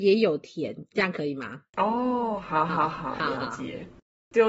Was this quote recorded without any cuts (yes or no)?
no